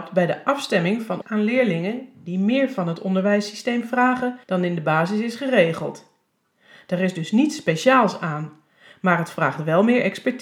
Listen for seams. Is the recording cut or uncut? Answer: cut